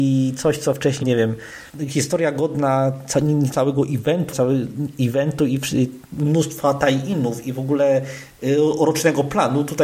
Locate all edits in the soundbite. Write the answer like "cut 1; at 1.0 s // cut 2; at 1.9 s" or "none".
cut 1; at 1.0 s // cut 2; at 1.7 s // cut 3; at 3.5 s // cut 4; at 4.3 s